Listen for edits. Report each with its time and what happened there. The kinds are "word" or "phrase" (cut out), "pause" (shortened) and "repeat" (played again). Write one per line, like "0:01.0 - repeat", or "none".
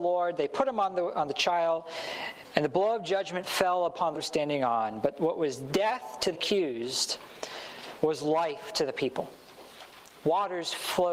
0:04.1 - phrase
0:06.3 - word